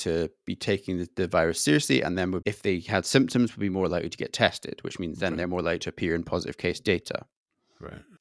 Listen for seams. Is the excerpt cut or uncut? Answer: uncut